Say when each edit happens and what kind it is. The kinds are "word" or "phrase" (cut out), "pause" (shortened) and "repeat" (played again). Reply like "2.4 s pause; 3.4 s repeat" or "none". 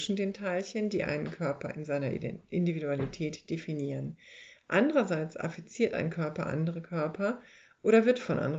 none